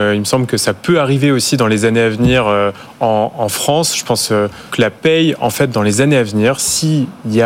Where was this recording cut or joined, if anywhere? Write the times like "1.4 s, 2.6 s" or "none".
4.7 s